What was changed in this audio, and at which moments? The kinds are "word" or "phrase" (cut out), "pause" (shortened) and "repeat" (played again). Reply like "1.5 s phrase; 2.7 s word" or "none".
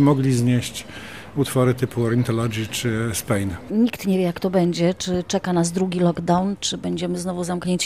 2.7 s word